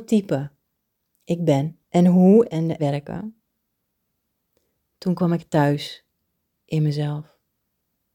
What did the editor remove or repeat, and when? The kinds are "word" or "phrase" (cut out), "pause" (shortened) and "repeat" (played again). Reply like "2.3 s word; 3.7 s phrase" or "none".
1.8 s pause; 2.5 s word; 2.8 s phrase

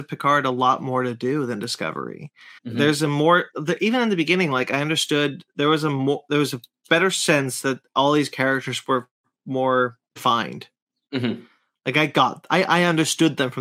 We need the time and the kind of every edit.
2.6 s pause; 10.1 s pause

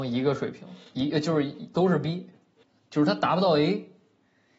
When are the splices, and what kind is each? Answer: 2.6 s pause

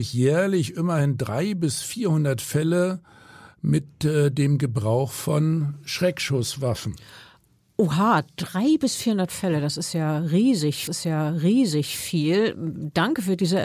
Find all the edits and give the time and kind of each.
10.9 s repeat

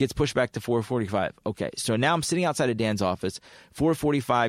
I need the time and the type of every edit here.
none

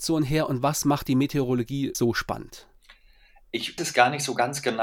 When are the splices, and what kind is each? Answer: 1.9 s phrase; 3.8 s word

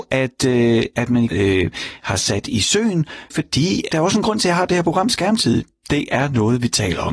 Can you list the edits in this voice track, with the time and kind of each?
1.3 s phrase; 3.3 s word; 3.9 s phrase

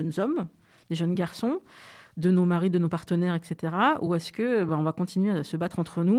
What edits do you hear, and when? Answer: none

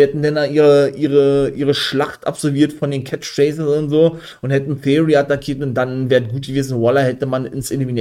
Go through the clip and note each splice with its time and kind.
none

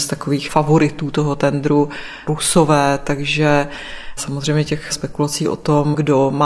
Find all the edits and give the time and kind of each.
2.3 s word

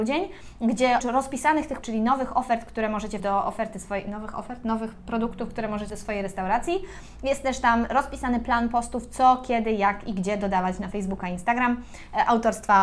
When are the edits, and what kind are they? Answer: 1.0 s word; 1.8 s word; 3.2 s word; 5.9 s word

